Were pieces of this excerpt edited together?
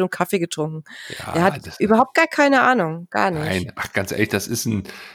no; 0 cuts

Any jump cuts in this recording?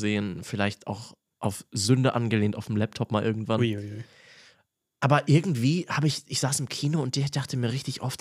no; 0 cuts

